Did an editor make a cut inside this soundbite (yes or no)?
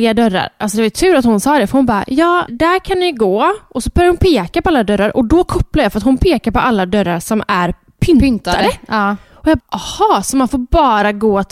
yes